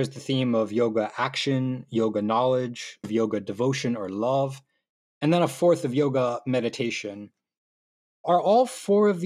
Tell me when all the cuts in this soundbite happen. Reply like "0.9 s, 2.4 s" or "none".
3.0 s